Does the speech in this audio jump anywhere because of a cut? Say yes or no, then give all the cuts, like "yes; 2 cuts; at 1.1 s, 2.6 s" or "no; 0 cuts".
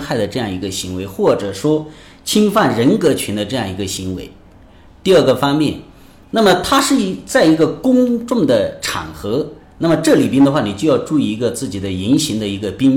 no; 0 cuts